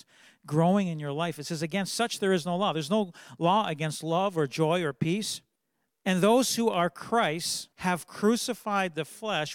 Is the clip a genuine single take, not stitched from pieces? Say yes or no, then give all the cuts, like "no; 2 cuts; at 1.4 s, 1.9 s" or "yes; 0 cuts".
no; 2 cuts; at 5.6 s, 7.7 s